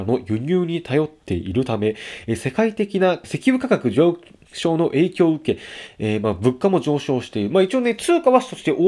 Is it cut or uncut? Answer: uncut